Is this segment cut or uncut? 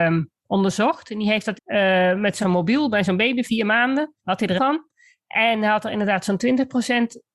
cut